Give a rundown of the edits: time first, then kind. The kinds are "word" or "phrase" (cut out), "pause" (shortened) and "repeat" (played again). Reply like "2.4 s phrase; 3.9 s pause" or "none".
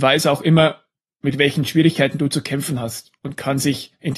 none